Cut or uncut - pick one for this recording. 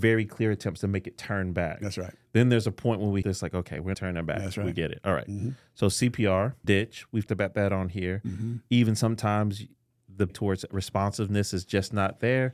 cut